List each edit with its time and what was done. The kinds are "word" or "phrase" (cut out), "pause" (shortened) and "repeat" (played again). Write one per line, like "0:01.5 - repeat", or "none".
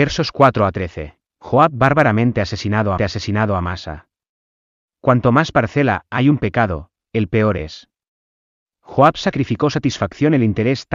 0:01.3 - pause
0:03.0 - repeat